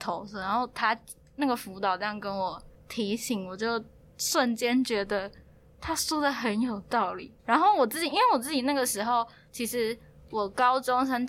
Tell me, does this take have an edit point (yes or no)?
yes